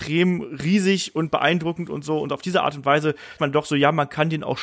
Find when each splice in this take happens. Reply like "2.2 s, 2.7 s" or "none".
3.4 s